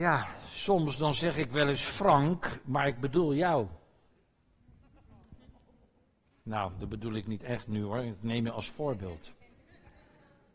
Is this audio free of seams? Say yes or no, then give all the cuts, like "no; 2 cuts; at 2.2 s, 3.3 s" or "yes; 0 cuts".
yes; 0 cuts